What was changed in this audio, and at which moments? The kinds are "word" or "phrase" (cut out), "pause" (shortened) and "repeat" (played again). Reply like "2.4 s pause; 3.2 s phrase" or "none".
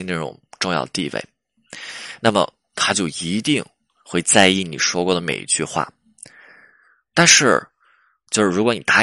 none